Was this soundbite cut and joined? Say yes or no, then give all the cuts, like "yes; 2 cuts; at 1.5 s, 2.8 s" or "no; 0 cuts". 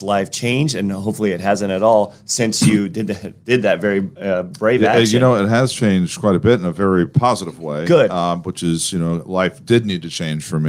yes; 1 cut; at 3.4 s